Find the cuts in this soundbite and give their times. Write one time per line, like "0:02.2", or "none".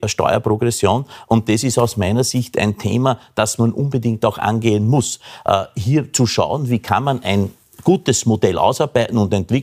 none